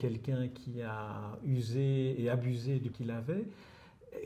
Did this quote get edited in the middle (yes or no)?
yes